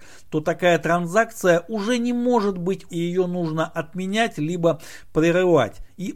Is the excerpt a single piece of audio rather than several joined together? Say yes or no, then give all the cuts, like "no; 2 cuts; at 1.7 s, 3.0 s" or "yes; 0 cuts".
no; 1 cut; at 2.9 s